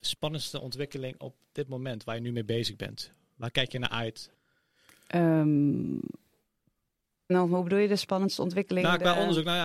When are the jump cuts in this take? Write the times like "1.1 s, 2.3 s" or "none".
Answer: 7.3 s